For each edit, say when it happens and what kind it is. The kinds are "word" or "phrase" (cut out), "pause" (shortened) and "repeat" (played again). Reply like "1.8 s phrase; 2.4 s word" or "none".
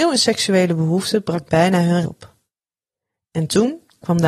2.0 s word